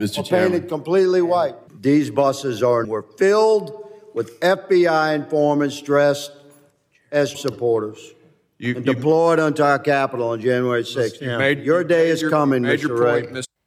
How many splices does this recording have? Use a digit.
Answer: 3